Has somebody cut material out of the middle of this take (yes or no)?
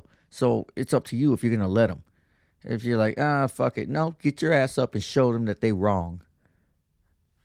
no